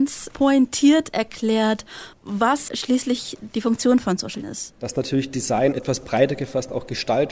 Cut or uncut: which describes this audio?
cut